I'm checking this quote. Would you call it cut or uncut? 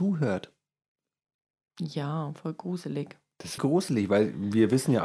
cut